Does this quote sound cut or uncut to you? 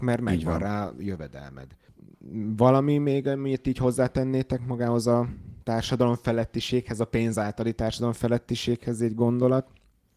uncut